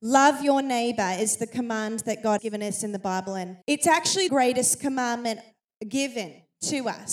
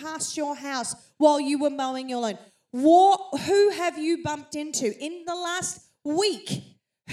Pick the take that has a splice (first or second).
first